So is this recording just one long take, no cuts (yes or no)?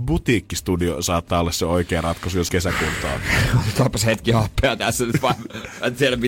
no